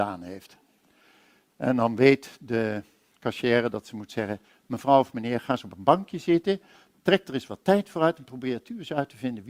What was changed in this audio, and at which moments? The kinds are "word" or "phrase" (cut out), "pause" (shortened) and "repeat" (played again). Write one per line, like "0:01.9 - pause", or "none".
none